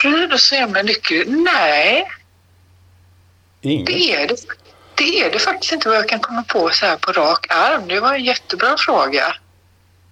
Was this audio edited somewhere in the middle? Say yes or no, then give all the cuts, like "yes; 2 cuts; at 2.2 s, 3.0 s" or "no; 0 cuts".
no; 0 cuts